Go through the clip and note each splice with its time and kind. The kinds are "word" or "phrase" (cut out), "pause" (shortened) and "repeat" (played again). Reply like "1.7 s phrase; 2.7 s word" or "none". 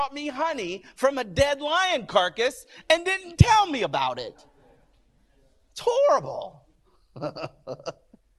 none